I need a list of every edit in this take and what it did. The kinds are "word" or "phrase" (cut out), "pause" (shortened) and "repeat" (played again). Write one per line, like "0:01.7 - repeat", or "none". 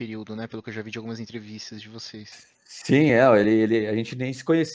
none